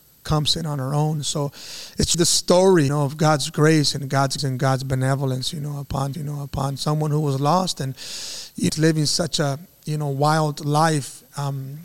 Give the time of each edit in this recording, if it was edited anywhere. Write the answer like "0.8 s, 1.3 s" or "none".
2.1 s, 2.9 s, 4.4 s, 6.1 s, 8.7 s